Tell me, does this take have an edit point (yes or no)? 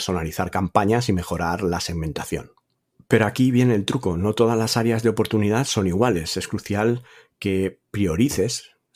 no